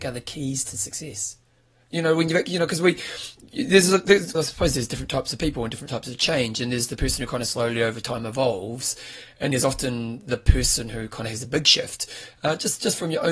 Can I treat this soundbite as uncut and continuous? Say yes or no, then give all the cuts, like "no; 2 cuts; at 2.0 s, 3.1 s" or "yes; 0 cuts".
no; 2 cuts; at 4.3 s, 9.5 s